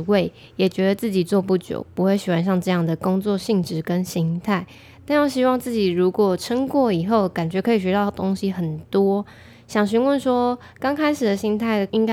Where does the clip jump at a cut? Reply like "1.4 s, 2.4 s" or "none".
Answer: none